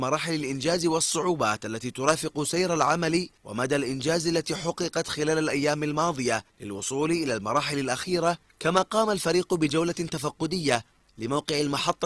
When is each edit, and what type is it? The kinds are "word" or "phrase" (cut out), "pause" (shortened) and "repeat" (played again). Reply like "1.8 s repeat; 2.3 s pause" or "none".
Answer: 3.4 s pause; 6.5 s pause